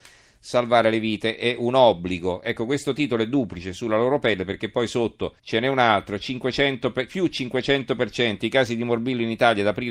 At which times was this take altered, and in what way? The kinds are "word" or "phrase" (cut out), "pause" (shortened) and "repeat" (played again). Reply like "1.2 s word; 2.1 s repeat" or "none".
5.4 s pause